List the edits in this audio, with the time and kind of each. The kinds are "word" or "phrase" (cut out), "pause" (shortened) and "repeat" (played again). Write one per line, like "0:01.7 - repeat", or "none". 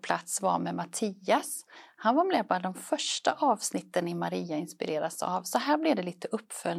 none